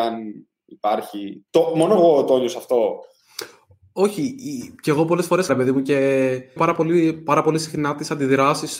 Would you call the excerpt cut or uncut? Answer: cut